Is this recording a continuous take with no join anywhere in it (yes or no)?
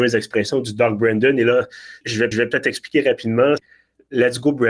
no